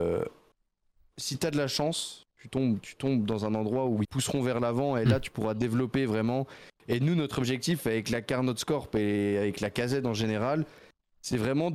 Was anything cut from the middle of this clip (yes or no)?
yes